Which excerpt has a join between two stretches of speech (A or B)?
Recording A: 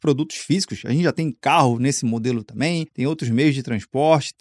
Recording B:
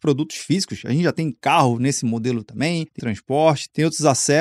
B